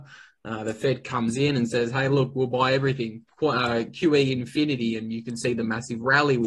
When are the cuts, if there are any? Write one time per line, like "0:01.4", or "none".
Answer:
none